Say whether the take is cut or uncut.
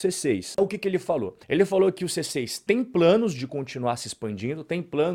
cut